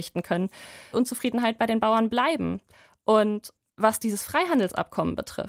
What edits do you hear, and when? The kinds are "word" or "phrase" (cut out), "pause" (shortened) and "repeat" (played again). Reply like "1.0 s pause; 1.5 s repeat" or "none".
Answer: 0.9 s phrase; 3.6 s pause